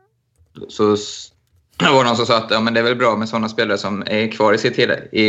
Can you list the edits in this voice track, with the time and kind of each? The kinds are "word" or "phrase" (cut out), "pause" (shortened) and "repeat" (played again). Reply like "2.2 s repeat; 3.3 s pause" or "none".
none